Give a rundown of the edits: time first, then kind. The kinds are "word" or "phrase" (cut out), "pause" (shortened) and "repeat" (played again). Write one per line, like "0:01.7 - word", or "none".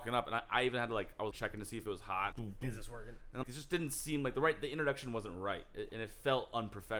0:01.3 - word
0:02.3 - phrase
0:03.4 - word